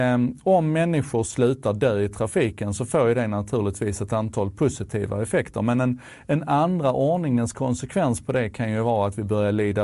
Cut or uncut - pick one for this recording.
uncut